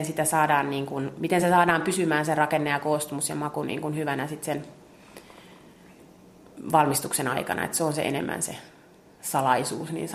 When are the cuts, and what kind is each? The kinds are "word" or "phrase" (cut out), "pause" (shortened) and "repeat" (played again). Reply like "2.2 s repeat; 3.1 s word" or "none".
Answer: none